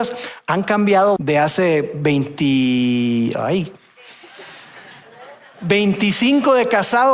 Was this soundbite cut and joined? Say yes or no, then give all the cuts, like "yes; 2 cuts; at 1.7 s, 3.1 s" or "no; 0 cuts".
yes; 1 cut; at 1.2 s